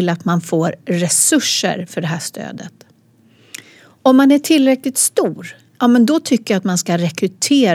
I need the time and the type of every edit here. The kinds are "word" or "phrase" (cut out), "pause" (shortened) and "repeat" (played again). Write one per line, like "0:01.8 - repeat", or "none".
none